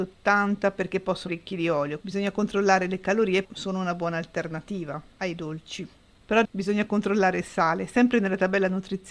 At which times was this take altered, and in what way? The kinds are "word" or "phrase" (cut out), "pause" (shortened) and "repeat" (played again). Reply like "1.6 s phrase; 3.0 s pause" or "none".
1.3 s word; 2.0 s word; 3.4 s word; 6.4 s word